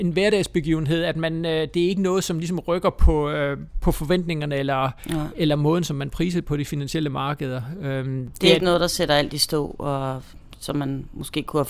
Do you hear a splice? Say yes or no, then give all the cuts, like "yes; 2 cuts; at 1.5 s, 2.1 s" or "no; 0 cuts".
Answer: no; 0 cuts